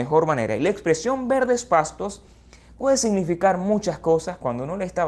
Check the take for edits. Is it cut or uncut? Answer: uncut